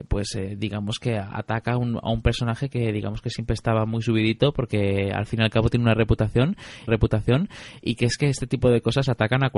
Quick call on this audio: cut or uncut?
cut